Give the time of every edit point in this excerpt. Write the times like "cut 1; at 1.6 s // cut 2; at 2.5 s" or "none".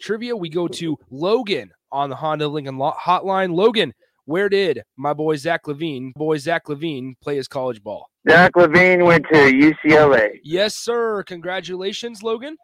cut 1; at 1.0 s // cut 2; at 6.2 s // cut 3; at 8.2 s